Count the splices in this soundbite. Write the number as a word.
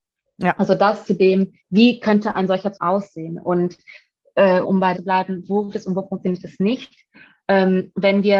five